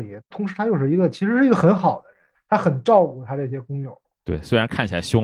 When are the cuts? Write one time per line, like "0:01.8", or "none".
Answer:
0:02.3

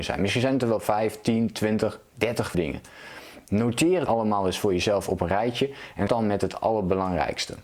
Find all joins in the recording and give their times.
0:02.5
0:04.1
0:06.1

